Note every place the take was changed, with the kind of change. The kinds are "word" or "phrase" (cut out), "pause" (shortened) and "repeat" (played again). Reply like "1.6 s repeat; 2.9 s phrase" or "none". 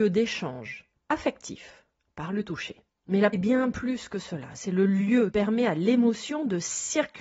2.9 s pause; 3.3 s word; 5.3 s word

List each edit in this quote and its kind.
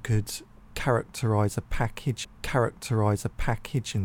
2.2 s repeat

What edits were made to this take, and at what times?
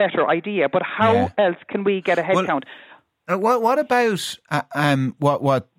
none

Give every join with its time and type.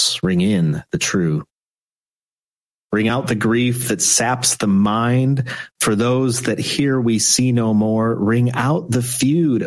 none

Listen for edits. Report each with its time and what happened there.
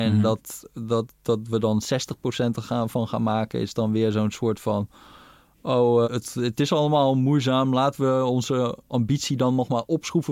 6.0 s word

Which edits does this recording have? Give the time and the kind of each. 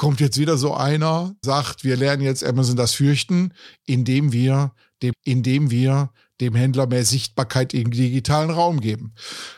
1.4 s word; 5.1 s repeat

